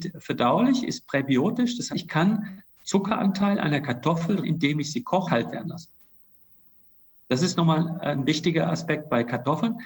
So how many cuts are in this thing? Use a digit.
4